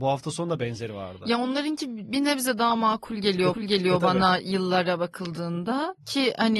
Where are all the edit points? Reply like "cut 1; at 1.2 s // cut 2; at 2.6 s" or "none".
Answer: cut 1; at 3.5 s